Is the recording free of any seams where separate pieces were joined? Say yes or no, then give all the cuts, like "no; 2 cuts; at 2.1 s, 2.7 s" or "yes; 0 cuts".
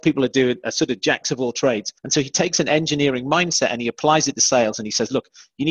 no; 1 cut; at 2.0 s